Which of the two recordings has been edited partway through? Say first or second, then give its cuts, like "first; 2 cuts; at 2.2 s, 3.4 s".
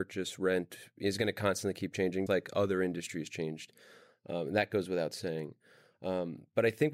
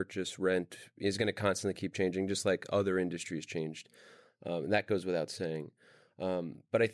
first; 1 cut; at 2.3 s